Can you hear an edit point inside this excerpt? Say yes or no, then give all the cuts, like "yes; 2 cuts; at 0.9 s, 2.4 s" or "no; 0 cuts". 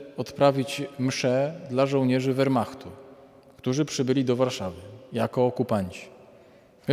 no; 0 cuts